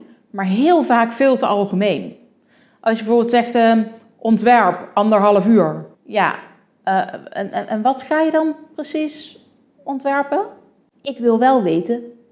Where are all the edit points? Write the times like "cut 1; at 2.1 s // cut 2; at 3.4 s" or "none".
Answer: cut 1; at 5.9 s